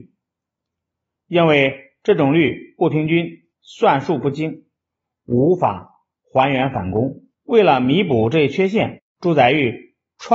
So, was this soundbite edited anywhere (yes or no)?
yes